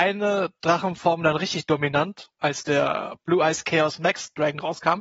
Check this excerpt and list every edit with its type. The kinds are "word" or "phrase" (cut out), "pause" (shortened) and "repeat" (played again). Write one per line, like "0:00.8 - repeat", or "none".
0:02.3 - word